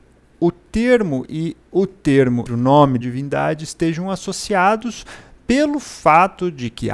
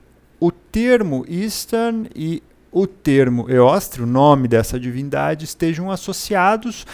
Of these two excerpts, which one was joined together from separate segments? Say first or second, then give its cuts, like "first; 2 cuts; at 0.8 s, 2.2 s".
first; 4 cuts; at 1.2 s, 1.6 s, 2.5 s, 3.0 s